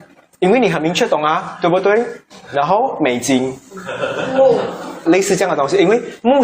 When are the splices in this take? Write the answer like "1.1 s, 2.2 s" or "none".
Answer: 5.1 s